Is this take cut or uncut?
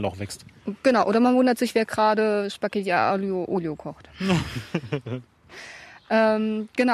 uncut